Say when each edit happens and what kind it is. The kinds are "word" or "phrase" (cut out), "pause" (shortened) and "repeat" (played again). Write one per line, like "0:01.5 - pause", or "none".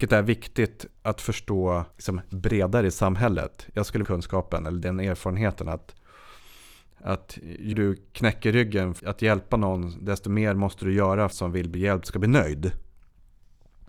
0:01.0 - pause
0:01.9 - pause
0:04.0 - phrase
0:07.7 - word
0:09.0 - word
0:11.3 - phrase